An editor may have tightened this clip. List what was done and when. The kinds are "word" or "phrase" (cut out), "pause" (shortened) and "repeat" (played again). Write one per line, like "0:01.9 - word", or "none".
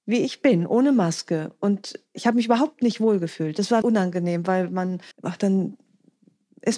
0:03.8 - word
0:05.1 - pause